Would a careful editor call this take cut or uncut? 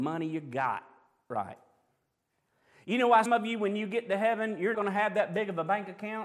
cut